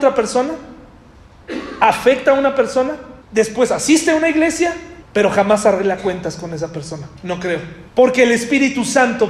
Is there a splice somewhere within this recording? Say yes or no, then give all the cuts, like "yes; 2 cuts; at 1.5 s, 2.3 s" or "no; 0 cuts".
yes; 4 cuts; at 3.2 s, 5.0 s, 7.2 s, 7.9 s